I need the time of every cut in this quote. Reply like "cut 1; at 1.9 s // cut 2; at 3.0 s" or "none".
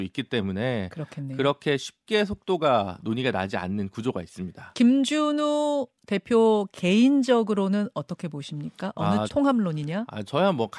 cut 1; at 9.3 s